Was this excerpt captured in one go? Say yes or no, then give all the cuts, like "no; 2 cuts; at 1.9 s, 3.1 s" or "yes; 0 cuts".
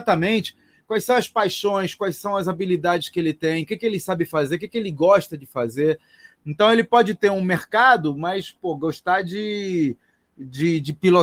yes; 0 cuts